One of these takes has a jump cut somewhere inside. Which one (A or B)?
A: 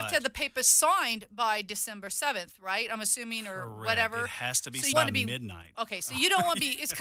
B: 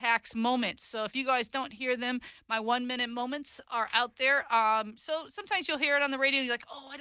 A